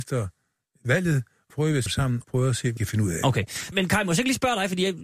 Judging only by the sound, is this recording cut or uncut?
cut